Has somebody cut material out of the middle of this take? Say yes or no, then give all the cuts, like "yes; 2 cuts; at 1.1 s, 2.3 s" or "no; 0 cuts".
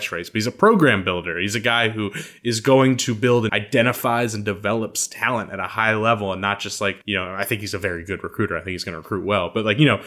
yes; 2 cuts; at 3.5 s, 7.0 s